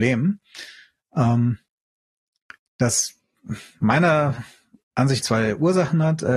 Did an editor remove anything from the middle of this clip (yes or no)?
yes